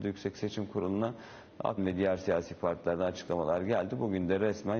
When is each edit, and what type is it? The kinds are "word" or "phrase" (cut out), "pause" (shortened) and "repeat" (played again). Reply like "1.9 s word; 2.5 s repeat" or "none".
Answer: 1.8 s word